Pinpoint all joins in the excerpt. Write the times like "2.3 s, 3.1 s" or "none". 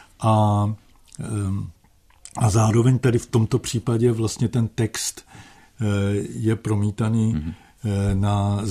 none